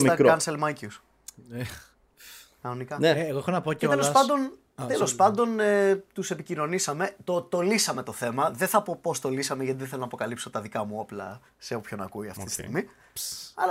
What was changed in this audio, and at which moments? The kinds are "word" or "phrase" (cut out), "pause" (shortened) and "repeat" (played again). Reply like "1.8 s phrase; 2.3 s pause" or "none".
none